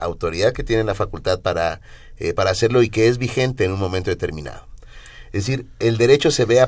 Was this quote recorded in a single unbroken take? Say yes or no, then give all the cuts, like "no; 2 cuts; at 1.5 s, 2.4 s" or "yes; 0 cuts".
yes; 0 cuts